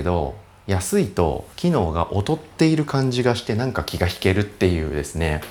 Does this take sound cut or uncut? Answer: cut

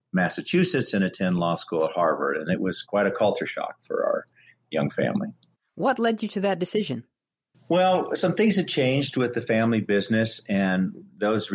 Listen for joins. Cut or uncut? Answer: uncut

